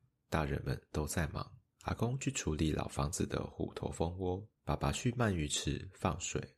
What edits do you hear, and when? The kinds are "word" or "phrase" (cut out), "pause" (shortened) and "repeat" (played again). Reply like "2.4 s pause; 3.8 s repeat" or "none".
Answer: 1.7 s pause; 4.6 s pause